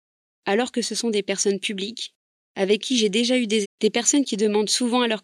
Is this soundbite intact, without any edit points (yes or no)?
no